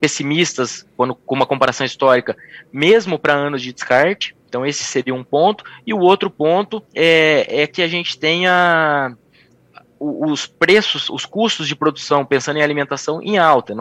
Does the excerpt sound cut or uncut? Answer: cut